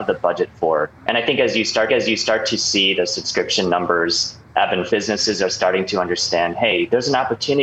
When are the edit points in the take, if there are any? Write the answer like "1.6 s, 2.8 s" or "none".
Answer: 1.0 s, 1.9 s, 4.9 s